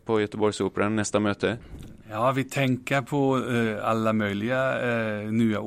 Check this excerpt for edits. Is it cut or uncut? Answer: uncut